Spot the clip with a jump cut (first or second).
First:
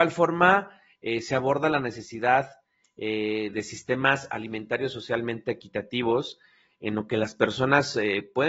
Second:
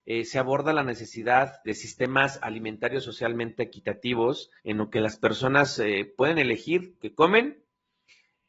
second